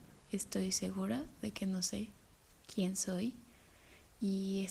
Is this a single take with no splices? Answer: yes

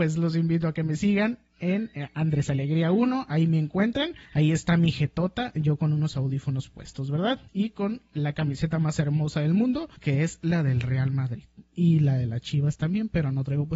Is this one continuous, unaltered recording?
no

